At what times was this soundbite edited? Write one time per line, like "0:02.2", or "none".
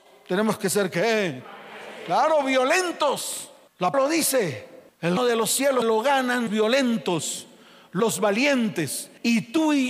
0:03.9
0:05.2
0:05.8
0:06.5
0:08.0